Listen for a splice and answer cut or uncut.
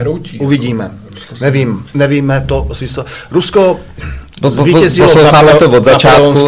uncut